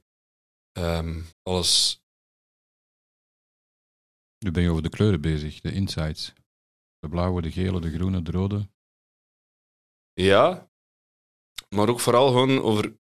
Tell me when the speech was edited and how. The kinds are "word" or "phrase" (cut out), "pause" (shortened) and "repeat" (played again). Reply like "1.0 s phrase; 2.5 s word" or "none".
1.3 s pause